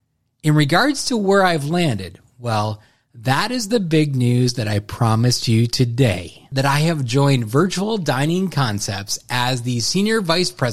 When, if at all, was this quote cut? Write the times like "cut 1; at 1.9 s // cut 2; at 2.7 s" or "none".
none